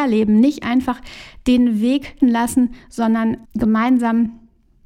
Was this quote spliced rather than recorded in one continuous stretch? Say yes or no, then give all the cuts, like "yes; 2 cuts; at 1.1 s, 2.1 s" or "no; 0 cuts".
yes; 2 cuts; at 2.2 s, 3.4 s